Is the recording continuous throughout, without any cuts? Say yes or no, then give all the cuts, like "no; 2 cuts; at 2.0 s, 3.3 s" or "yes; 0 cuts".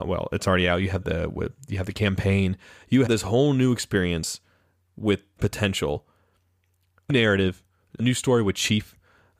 no; 5 cuts; at 1.0 s, 3.1 s, 5.4 s, 7.1 s, 8.0 s